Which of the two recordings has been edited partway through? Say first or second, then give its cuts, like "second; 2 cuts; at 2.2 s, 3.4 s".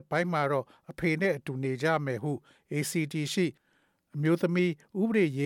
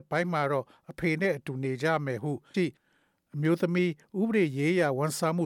second; 1 cut; at 2.5 s